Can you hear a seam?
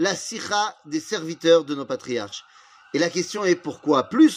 no; 0 cuts

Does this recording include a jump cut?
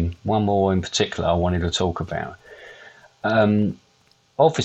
no; 0 cuts

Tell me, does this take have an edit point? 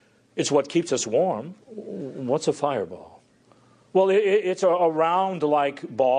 yes; 1 cut; at 1.6 s

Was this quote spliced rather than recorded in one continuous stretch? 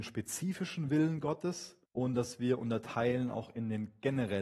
yes; 1 cut; at 1.9 s

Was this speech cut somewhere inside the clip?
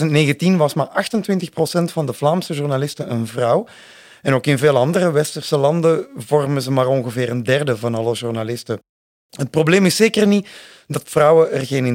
no; 0 cuts

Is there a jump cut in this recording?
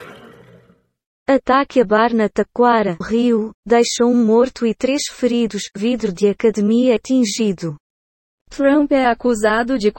yes; 2 cuts; at 3.0 s, 7.0 s

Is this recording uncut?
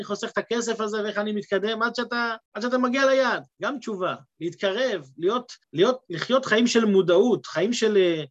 no; 3 cuts; at 2.4 s, 3.5 s, 5.6 s

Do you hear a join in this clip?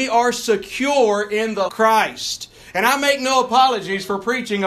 yes; 1 cut; at 1.7 s

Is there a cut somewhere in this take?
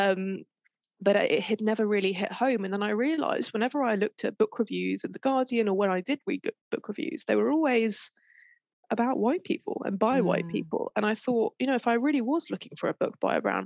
no; 0 cuts

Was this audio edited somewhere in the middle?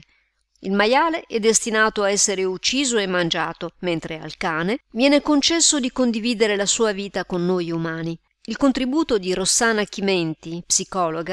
no; 0 cuts

